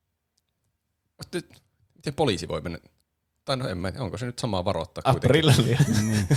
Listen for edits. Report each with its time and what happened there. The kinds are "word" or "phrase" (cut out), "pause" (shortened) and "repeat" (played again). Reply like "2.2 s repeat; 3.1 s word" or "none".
none